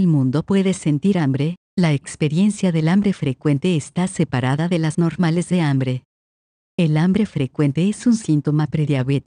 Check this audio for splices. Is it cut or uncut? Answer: cut